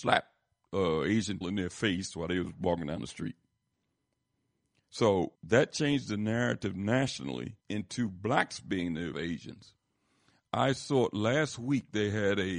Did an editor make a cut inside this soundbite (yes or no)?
yes